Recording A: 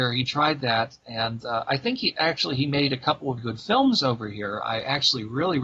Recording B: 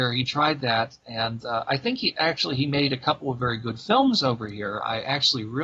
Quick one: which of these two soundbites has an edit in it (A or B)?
A